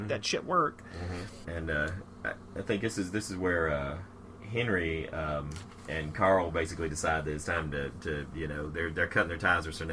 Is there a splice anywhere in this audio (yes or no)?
no